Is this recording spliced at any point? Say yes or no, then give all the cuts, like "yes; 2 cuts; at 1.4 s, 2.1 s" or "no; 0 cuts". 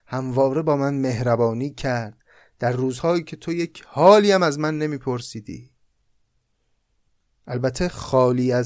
no; 0 cuts